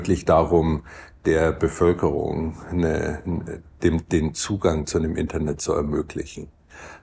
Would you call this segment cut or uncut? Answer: uncut